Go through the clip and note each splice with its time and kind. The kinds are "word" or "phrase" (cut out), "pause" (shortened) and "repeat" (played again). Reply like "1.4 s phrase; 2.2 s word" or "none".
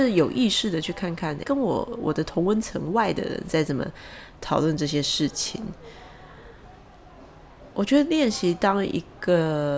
1.4 s word